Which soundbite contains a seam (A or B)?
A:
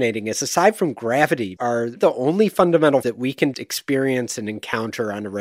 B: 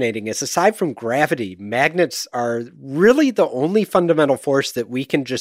A